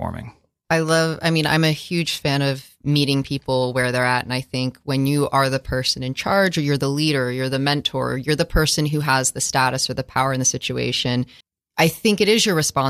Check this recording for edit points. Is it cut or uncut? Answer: cut